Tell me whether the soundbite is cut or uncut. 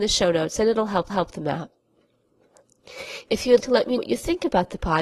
cut